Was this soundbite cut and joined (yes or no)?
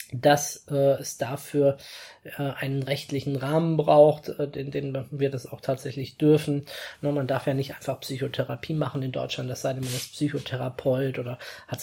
no